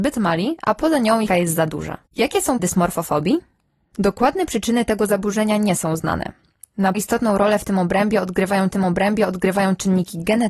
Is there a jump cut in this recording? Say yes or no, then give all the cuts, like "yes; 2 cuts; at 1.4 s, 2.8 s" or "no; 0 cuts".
yes; 5 cuts; at 1.3 s, 2.1 s, 2.6 s, 6.9 s, 8.7 s